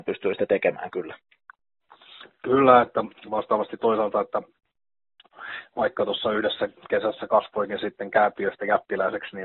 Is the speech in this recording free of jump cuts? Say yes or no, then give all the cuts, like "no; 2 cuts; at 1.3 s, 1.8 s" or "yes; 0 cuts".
no; 1 cut; at 3.8 s